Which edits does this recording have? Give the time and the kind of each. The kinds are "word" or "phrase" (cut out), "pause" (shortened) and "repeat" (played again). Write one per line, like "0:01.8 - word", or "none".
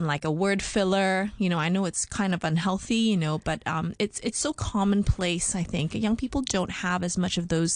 none